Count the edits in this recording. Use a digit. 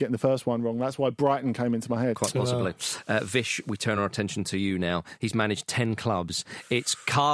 0